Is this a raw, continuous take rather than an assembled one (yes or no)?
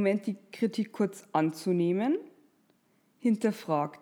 yes